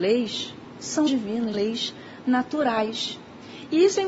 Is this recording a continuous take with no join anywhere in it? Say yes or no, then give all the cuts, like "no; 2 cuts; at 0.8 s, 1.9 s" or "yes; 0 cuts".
no; 2 cuts; at 1.1 s, 1.5 s